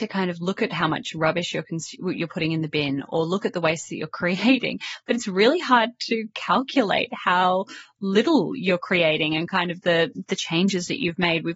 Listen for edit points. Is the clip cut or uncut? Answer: uncut